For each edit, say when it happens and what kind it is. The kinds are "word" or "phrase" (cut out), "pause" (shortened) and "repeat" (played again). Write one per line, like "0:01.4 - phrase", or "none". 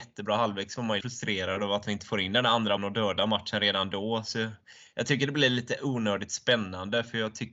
0:01.0 - word
0:02.8 - word